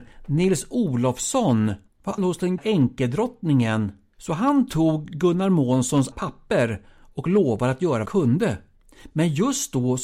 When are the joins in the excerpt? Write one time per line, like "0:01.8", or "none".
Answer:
0:02.2
0:02.6
0:06.1
0:08.1